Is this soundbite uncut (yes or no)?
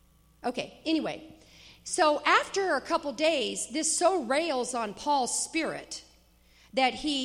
yes